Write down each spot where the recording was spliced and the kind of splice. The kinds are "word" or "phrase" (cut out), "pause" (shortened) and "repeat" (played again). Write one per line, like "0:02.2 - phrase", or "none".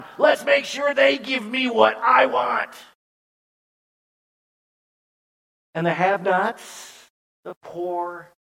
none